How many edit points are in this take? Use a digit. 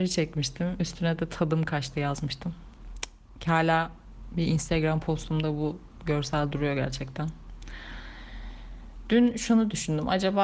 0